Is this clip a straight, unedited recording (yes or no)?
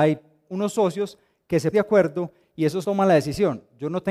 no